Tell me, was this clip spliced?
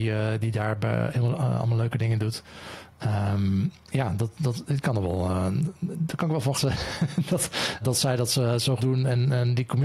yes; 4 cuts; at 3.8 s, 6.5 s, 7.8 s, 8.8 s

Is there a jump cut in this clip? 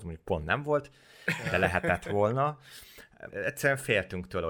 yes; 1 cut; at 3.3 s

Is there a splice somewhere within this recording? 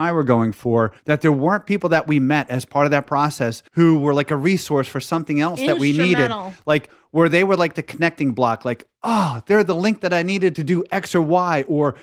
yes; 2 cuts; at 1.0 s, 3.7 s

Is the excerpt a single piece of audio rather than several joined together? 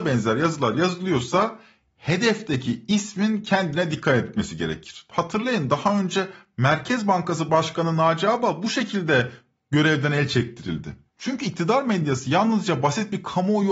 yes; 0 cuts

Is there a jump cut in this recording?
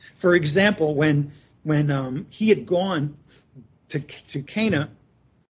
no; 0 cuts

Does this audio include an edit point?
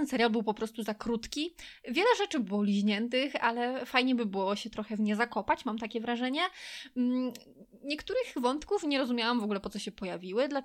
no; 0 cuts

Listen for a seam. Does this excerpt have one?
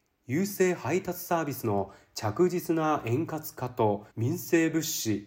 yes; 1 cut; at 4.1 s

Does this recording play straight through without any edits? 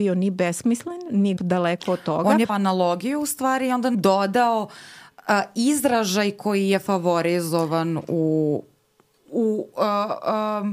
no; 4 cuts; at 1.4 s, 2.5 s, 3.9 s, 9.3 s

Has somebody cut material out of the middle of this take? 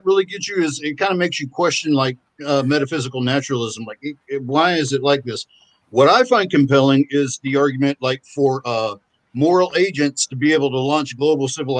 no; 0 cuts

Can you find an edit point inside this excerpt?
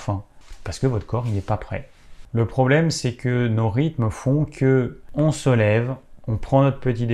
no; 0 cuts

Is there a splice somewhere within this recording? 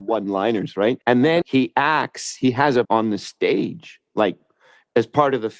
yes; 3 cuts; at 1.0 s, 1.4 s, 2.8 s

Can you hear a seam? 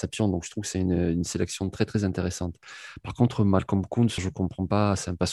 yes; 1 cut; at 4.2 s

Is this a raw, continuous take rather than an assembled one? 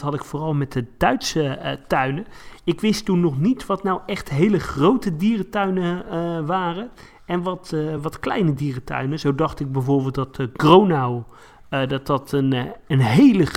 yes; 0 cuts

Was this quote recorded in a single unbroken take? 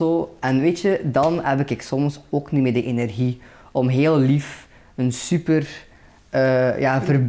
yes; 0 cuts

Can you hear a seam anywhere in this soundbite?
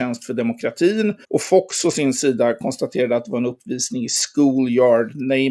yes; 1 cut; at 1.2 s

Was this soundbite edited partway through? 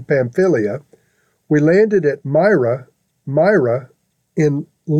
yes; 1 cut; at 3.2 s

